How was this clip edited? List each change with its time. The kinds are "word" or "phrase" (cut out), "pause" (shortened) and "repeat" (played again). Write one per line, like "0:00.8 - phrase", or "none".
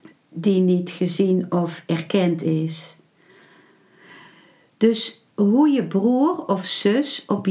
0:05.3 - pause

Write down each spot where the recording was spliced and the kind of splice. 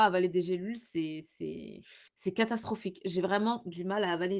0:02.1 - pause

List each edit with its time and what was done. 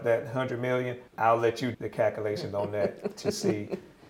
0:01.1 - pause
0:01.7 - word

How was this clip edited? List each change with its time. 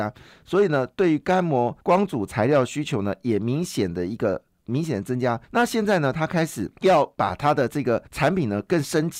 0:01.8 - pause
0:05.4 - pause
0:06.8 - pause
0:08.1 - pause

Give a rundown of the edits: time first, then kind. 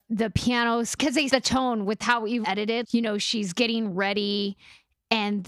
0:01.0 - word
0:01.3 - word
0:02.4 - word
0:02.8 - word

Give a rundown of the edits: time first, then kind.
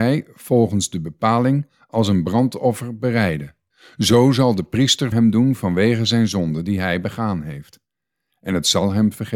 0:03.7 - pause
0:05.1 - phrase

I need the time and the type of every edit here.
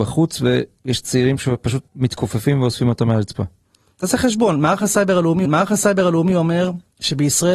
0:01.9 - pause
0:05.4 - repeat

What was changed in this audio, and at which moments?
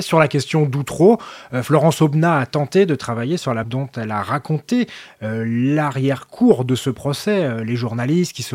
0:03.6 - word

